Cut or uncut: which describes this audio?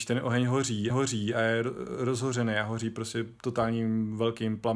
cut